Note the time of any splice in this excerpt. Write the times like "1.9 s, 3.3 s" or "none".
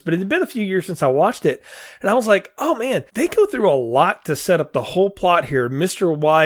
3.1 s